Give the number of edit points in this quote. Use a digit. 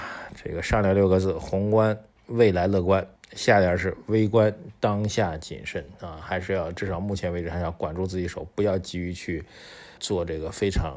3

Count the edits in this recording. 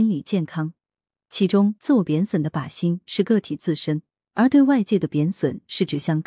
0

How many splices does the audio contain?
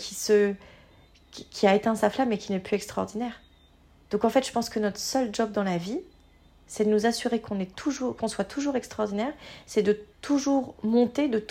1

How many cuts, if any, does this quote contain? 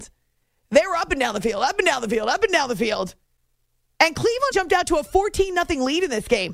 1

